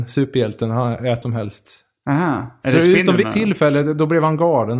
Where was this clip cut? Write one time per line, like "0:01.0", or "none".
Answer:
0:01.2
0:03.2